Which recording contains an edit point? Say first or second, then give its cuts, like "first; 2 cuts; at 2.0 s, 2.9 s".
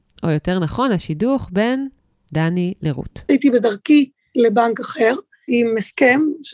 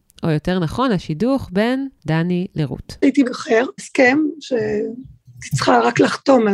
second; 3 cuts; at 2.0 s, 3.2 s, 3.8 s